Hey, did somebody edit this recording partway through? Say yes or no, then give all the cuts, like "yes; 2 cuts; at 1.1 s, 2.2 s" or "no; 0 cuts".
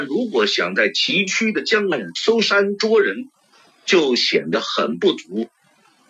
no; 0 cuts